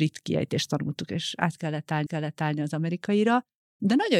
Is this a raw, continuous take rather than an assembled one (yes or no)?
no